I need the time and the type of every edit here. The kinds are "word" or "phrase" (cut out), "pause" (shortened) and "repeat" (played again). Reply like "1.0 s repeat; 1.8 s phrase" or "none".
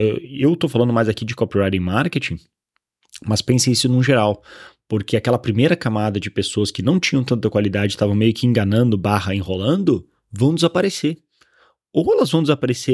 none